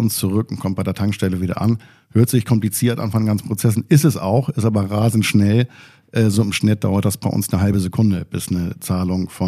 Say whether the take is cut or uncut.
uncut